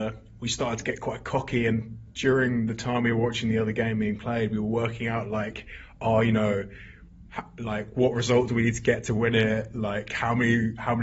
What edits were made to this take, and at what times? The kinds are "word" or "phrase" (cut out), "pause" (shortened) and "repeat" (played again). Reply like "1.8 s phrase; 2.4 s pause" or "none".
none